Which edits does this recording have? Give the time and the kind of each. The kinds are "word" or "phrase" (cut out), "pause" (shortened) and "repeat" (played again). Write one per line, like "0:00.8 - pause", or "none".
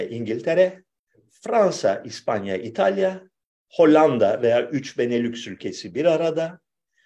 none